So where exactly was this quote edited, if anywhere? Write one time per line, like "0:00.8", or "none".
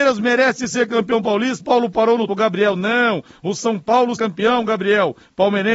0:01.6
0:02.3
0:04.2

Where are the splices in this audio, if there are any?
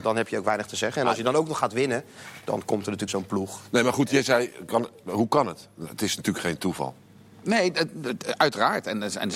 0:03.1

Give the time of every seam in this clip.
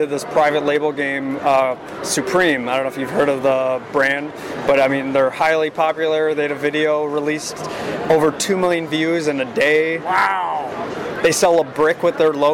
none

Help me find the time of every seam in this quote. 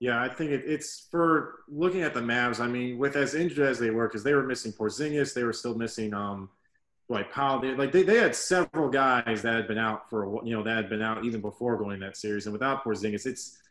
none

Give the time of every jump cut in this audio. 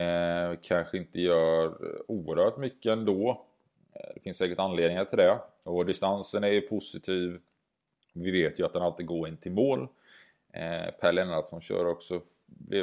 none

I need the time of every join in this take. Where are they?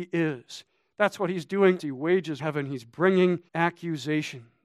0:01.8
0:02.4
0:03.5

